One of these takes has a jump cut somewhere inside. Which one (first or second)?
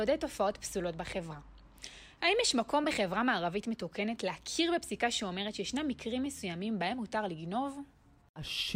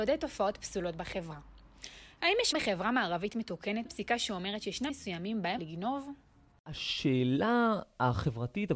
second